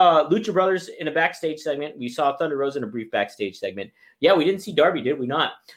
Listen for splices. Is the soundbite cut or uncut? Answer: uncut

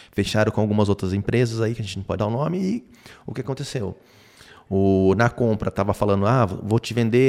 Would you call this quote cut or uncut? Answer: cut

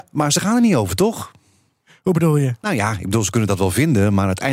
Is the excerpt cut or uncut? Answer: uncut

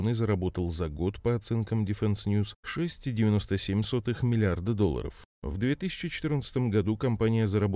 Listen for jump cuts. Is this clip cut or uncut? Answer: uncut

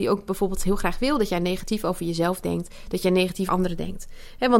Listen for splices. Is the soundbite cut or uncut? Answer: cut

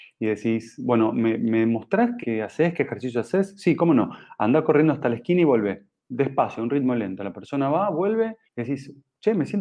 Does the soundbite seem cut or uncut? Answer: cut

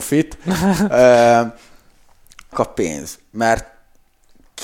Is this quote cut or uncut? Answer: cut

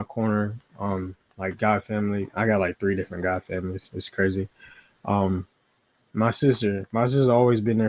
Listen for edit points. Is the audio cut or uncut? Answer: uncut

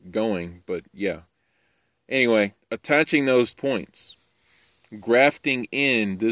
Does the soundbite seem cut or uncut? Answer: cut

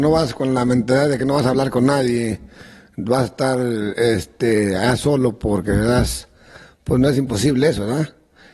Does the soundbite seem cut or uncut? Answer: uncut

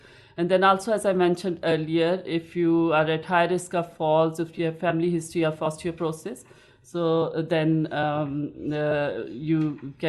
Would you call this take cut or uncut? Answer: uncut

